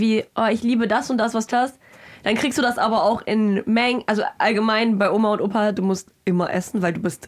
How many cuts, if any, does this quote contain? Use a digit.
1